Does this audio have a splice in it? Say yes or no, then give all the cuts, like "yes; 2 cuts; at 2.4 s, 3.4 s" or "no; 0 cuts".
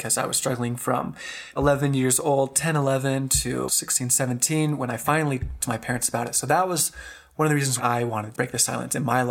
yes; 5 cuts; at 1.6 s, 3.7 s, 5.6 s, 7.8 s, 8.3 s